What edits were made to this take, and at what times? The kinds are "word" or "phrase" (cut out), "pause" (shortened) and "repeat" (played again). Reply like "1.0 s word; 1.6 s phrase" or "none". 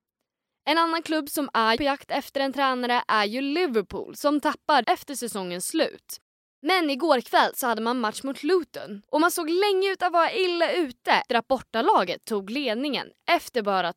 1.8 s word; 4.8 s phrase; 9.1 s pause; 11.3 s word